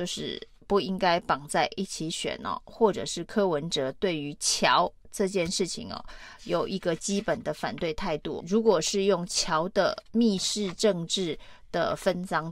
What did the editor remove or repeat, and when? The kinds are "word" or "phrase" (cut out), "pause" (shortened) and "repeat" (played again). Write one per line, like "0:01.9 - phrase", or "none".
0:08.4 - phrase